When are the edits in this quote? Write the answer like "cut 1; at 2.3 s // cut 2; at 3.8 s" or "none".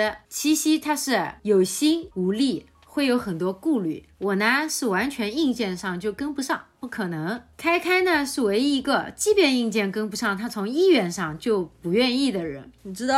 cut 1; at 4.1 s

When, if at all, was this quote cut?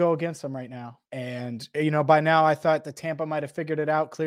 cut 1; at 1.1 s

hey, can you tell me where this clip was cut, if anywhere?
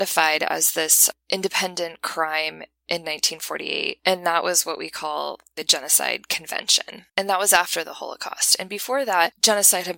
cut 1; at 7.1 s

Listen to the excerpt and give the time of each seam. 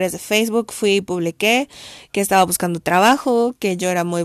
none

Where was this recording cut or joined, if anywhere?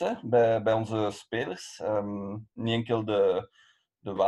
cut 1; at 2.5 s

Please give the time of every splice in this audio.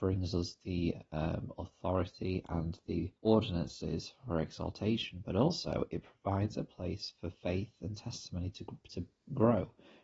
cut 1; at 3.2 s

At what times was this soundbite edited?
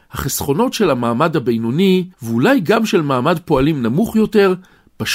cut 1; at 2.1 s

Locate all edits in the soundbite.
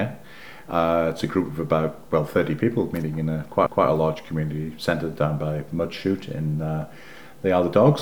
cut 1; at 3.7 s

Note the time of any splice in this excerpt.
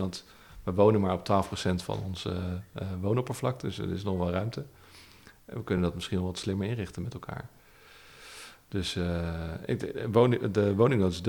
none

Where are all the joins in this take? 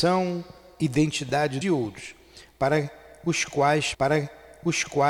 cut 1; at 1.6 s // cut 2; at 3.9 s

